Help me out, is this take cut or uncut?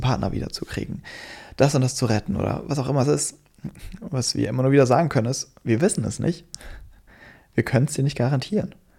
uncut